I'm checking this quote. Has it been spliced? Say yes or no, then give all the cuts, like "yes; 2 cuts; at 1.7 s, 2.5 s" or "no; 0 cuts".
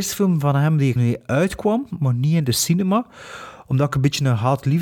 yes; 1 cut; at 1.0 s